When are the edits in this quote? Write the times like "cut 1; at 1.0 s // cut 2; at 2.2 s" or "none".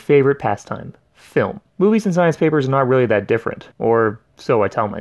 cut 1; at 1.7 s // cut 2; at 3.7 s

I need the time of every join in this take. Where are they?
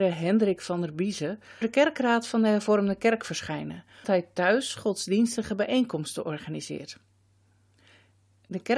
cut 1; at 1.6 s // cut 2; at 4.0 s

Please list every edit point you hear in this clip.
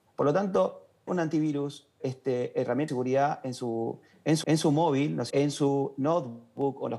cut 1; at 1.1 s // cut 2; at 2.0 s // cut 3; at 2.9 s // cut 4; at 4.4 s // cut 5; at 5.3 s

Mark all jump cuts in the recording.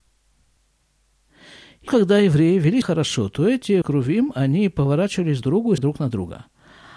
cut 1; at 1.9 s // cut 2; at 2.8 s // cut 3; at 3.8 s // cut 4; at 5.4 s // cut 5; at 5.8 s

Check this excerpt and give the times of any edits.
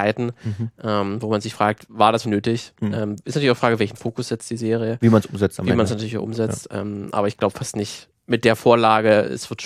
cut 1; at 2.2 s

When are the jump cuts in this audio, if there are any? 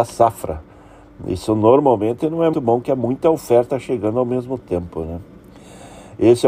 cut 1; at 2.5 s

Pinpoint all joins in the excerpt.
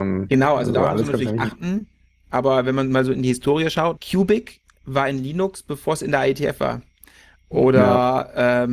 cut 1; at 4.0 s

